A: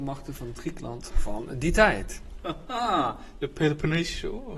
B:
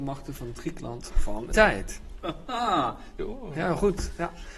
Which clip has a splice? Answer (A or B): B